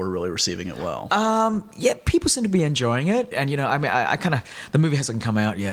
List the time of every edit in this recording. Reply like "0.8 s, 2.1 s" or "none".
3.3 s